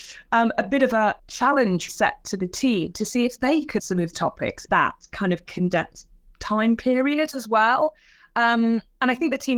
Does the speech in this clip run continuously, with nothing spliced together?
no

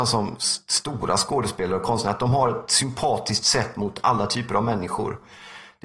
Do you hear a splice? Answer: no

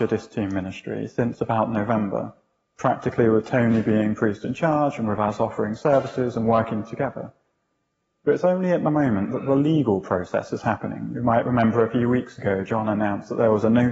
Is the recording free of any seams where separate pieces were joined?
yes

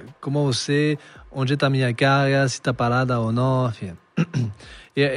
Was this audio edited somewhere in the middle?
no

